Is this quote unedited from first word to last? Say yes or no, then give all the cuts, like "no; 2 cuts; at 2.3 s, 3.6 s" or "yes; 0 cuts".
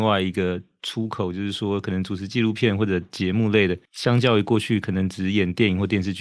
no; 1 cut; at 3.9 s